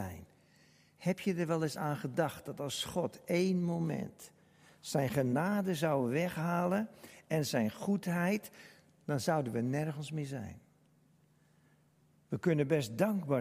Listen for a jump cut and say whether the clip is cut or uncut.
uncut